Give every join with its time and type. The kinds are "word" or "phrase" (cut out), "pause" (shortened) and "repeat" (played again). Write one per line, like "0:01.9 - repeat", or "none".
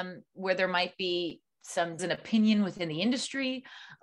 0:02.0 - word